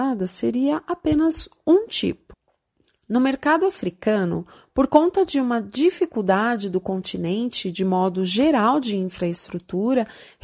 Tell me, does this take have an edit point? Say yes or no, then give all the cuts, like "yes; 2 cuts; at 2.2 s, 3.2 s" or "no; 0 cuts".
no; 0 cuts